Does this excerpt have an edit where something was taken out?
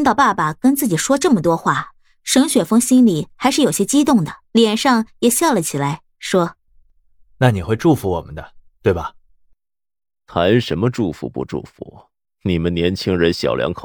yes; 3 cuts; at 4.4 s, 6.7 s, 12.2 s

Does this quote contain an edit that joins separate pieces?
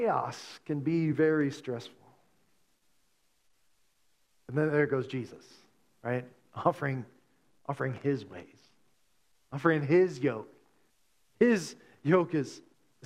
no; 0 cuts

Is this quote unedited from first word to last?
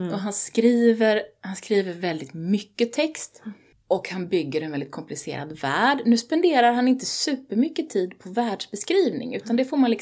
no; 1 cut; at 3.7 s

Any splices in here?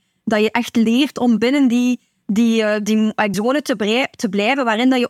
yes; 1 cut; at 3.3 s

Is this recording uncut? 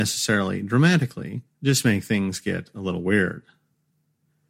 no; 1 cut; at 1.5 s

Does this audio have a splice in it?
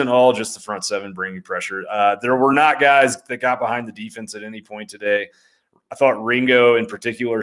no; 0 cuts

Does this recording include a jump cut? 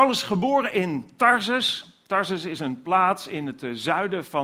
no; 0 cuts

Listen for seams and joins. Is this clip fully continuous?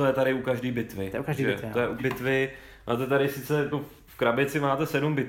no; 3 cuts; at 2.0 s, 3.7 s, 4.1 s

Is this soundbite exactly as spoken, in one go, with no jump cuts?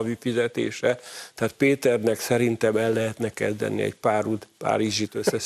yes; 0 cuts

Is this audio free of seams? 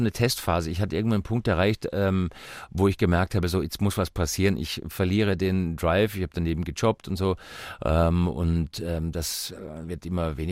yes; 0 cuts

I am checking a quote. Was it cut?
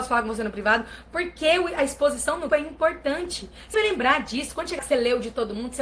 yes; 3 cuts; at 2.5 s, 3.7 s, 4.8 s

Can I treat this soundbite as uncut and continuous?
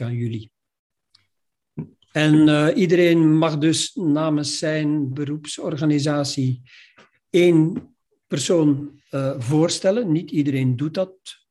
yes; 0 cuts

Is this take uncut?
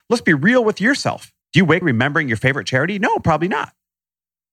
no; 2 cuts; at 1.4 s, 1.8 s

